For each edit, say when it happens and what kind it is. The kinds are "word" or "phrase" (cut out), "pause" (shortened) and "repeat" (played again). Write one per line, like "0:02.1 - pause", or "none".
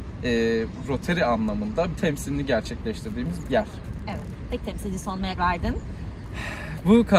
0:01.9 - word
0:03.4 - word
0:04.6 - phrase
0:05.4 - word